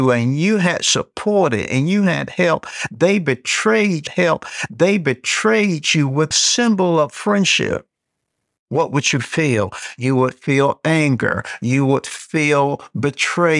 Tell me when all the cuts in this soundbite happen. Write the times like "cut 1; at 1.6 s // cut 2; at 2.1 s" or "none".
cut 1; at 4.1 s // cut 2; at 6.3 s